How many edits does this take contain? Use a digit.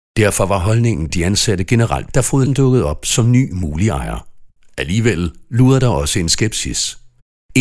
4